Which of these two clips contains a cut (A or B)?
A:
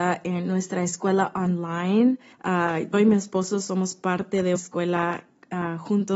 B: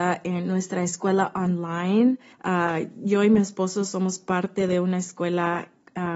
A